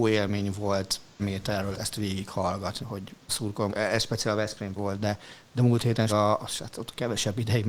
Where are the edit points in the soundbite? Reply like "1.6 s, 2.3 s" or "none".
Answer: 1.2 s, 1.7 s, 2.8 s, 3.3 s, 3.7 s, 4.8 s, 6.1 s, 6.4 s